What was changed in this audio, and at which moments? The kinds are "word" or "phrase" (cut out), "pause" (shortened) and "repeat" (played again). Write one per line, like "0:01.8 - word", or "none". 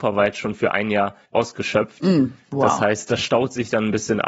0:01.2 - pause